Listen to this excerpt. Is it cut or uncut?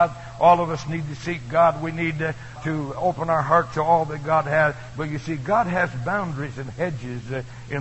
cut